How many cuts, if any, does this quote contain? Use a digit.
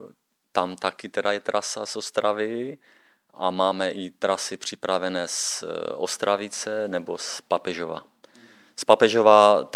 0